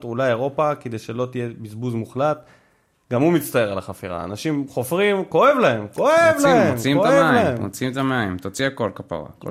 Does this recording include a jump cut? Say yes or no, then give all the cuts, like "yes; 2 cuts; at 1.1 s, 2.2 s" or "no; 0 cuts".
no; 0 cuts